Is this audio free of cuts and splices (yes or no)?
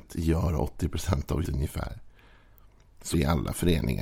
no